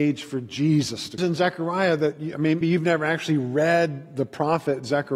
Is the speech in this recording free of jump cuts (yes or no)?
no